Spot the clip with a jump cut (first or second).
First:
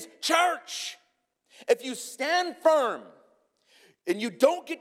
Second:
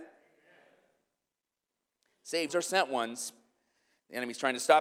second